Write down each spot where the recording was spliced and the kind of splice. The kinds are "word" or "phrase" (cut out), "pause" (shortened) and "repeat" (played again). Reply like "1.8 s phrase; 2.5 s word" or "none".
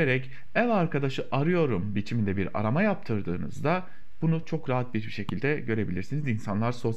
none